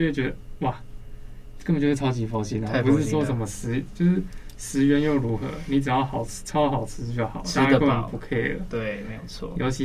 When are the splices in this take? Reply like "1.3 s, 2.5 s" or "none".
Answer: none